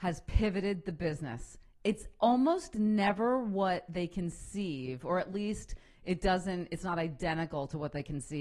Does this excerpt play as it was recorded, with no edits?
yes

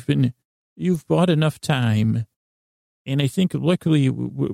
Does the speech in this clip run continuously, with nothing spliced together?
yes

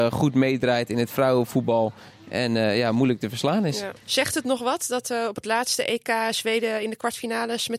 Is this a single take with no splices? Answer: no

